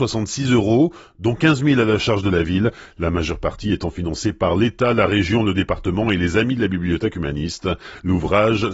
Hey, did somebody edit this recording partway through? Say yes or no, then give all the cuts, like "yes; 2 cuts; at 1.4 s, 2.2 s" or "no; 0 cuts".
no; 0 cuts